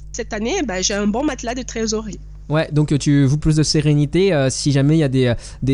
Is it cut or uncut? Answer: cut